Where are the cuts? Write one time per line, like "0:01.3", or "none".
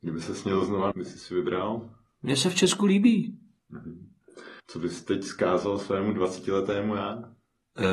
0:00.9
0:04.6